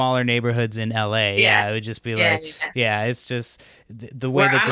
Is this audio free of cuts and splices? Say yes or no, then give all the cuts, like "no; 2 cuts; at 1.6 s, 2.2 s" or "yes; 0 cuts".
yes; 0 cuts